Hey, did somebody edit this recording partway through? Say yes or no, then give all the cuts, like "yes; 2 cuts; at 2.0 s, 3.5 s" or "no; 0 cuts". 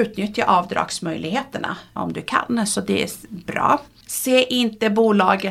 no; 0 cuts